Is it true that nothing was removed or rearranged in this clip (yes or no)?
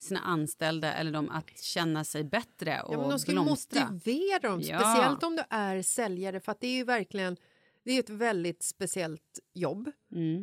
yes